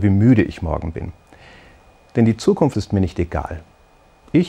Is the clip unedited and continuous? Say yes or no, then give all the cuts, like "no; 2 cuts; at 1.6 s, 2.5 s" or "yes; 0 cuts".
no; 1 cut; at 2.7 s